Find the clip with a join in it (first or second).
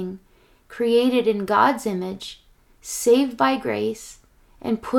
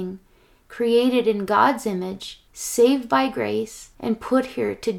second